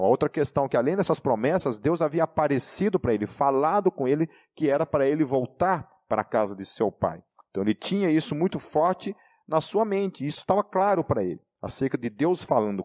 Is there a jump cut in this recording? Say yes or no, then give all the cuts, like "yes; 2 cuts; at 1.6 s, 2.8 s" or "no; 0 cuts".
no; 0 cuts